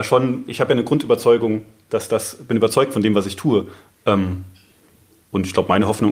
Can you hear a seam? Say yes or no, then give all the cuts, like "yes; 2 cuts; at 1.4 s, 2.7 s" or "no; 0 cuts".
no; 0 cuts